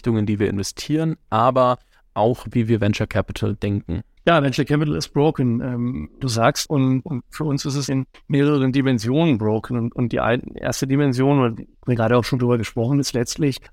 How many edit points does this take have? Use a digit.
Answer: 4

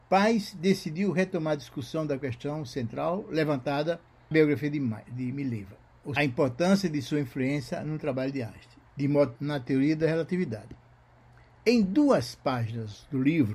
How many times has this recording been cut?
4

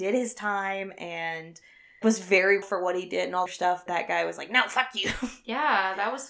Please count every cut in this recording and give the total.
4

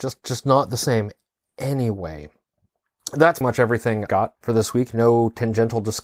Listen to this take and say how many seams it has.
3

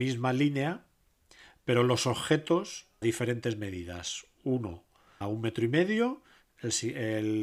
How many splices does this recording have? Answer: 2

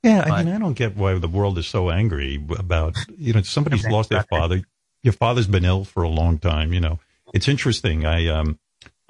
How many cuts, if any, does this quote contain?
1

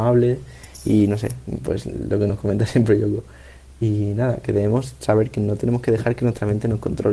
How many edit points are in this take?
0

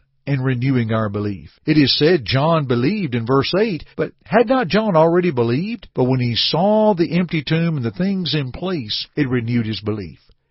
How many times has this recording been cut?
4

